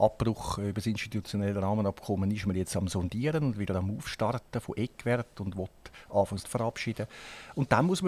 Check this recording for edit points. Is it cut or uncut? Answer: cut